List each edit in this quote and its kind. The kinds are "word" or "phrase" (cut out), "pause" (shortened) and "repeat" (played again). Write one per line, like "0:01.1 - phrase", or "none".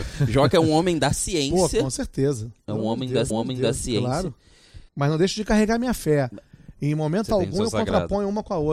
0:03.3 - repeat
0:04.9 - pause